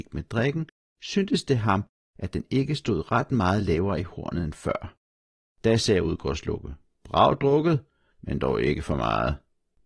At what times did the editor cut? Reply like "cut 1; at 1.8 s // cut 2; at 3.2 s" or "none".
none